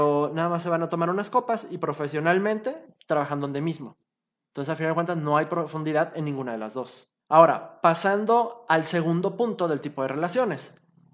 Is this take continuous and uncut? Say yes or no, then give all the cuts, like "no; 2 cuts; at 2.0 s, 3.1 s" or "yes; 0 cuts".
no; 1 cut; at 7.2 s